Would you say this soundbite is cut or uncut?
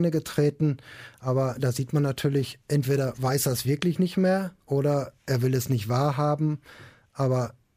cut